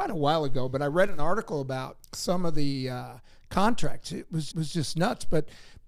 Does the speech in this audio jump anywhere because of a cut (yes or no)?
yes